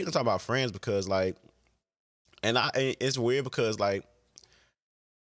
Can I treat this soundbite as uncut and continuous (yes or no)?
yes